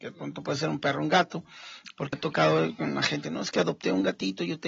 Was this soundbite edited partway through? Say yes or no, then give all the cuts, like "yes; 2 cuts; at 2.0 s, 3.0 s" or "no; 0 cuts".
yes; 2 cuts; at 2.1 s, 3.2 s